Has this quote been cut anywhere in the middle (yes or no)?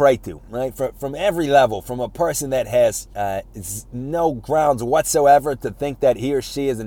yes